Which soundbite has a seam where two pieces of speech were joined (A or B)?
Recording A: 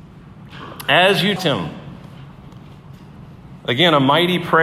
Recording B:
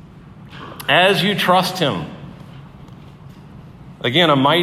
A